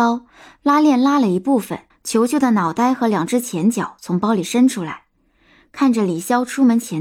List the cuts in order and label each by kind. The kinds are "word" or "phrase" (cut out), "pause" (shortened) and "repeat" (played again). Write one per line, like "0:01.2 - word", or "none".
0:01.9 - pause